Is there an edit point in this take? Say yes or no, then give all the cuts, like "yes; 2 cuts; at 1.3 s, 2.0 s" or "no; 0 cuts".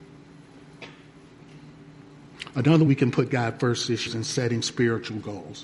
yes; 2 cuts; at 2.9 s, 4.1 s